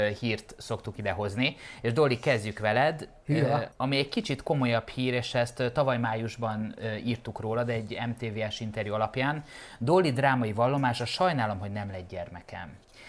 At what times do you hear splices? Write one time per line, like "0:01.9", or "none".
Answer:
0:03.7